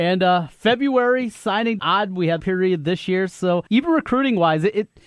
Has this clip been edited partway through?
yes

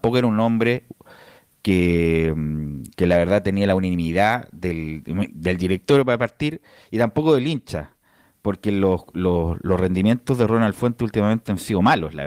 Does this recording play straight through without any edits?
yes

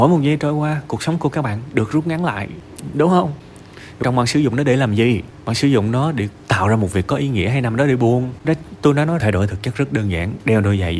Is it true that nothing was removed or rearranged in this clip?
no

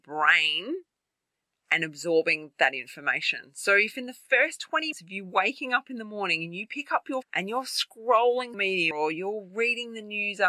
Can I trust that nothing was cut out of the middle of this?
no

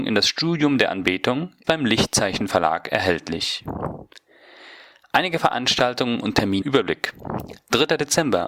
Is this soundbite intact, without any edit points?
no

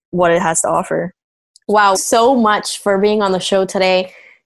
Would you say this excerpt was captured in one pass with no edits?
no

